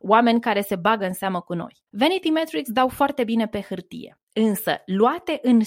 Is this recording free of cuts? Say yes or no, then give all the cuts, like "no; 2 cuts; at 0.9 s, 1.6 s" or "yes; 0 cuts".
no; 2 cuts; at 1.9 s, 4.2 s